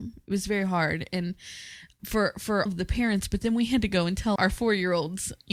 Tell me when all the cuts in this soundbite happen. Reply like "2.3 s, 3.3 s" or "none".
2.0 s, 2.7 s, 4.4 s